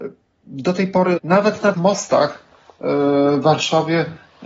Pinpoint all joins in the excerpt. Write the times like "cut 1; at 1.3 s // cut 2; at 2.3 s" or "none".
cut 1; at 1.2 s // cut 2; at 1.7 s